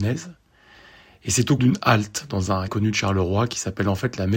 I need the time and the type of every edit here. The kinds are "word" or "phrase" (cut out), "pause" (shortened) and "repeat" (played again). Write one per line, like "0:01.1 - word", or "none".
0:01.6 - word
0:02.7 - word

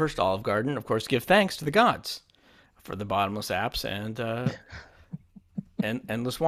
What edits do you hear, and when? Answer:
none

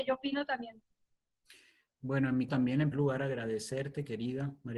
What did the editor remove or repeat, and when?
0:02.5 - word
0:02.9 - word

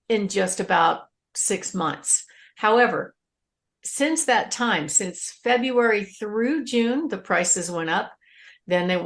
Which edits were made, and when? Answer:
none

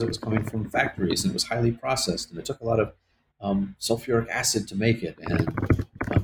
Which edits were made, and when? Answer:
none

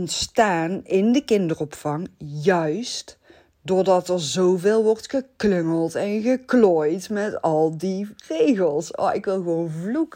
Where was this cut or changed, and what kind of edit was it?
0:08.2 - pause

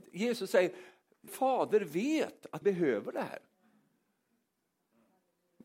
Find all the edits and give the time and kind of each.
0:01.3 - word
0:02.6 - word

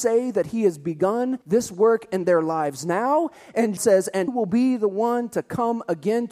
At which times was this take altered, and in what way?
0:01.4 - pause
0:03.8 - word
0:04.3 - word

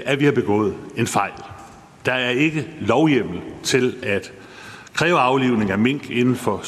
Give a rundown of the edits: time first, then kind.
none

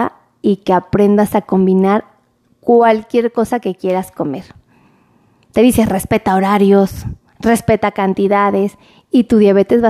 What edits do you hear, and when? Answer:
none

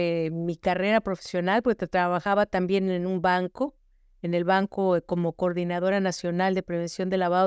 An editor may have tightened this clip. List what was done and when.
none

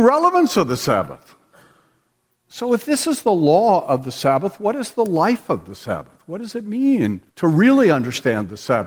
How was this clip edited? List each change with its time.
0:07.3 - pause

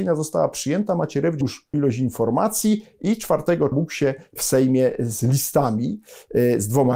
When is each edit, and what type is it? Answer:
0:01.4 - word
0:01.7 - word
0:03.7 - word
0:04.4 - word

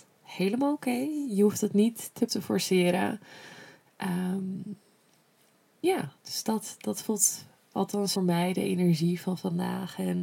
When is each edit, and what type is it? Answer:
0:02.3 - phrase
0:06.2 - pause
0:08.2 - phrase

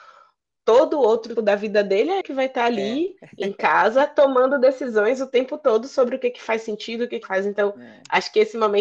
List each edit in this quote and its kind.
0:01.4 - word
0:02.2 - word
0:07.2 - word

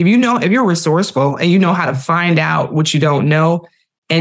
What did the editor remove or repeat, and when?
none

